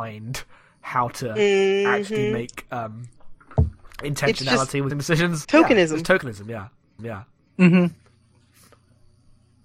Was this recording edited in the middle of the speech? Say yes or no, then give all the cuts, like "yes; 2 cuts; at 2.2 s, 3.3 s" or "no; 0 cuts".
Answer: yes; 3 cuts; at 4.9 s, 5.4 s, 7.0 s